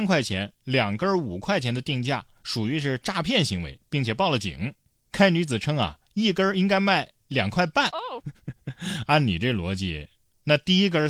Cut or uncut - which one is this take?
uncut